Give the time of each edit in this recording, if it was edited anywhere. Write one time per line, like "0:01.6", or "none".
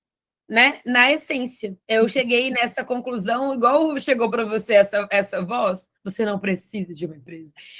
0:01.8
0:06.0